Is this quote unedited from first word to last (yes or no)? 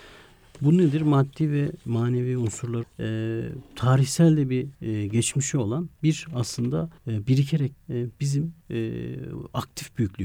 no